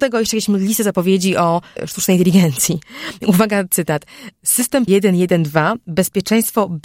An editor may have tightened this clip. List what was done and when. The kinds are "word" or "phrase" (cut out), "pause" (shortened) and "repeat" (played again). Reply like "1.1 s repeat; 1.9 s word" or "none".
1.8 s word; 4.9 s word